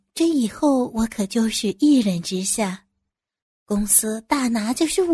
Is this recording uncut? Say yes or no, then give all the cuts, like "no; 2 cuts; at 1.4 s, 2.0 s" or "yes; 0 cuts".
yes; 0 cuts